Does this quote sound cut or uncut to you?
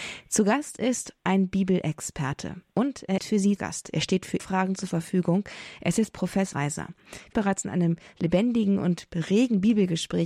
cut